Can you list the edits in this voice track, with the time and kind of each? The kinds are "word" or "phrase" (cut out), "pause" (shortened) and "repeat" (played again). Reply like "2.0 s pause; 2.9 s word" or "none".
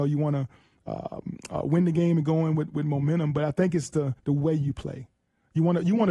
4.2 s pause